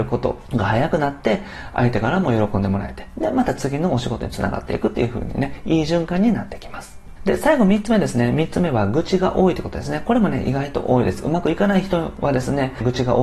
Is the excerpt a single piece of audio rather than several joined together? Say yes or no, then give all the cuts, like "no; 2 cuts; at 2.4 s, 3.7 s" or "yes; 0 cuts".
yes; 0 cuts